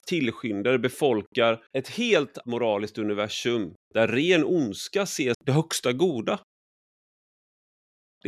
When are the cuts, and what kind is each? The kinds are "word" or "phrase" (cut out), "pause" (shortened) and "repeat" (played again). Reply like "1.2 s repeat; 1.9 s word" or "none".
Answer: 1.7 s pause; 2.4 s word; 3.8 s pause; 5.3 s word